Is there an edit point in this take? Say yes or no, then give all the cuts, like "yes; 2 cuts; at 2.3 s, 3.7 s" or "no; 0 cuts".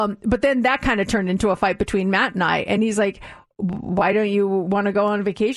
no; 0 cuts